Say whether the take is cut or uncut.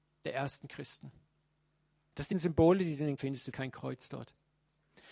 cut